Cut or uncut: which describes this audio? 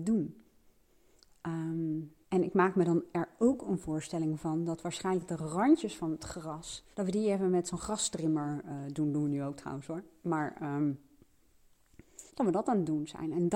cut